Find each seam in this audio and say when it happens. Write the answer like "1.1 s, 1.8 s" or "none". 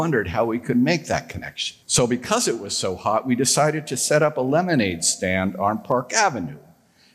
1.8 s